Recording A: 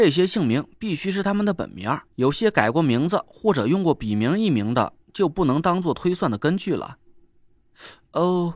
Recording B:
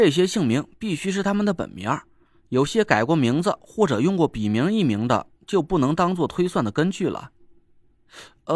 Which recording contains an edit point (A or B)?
A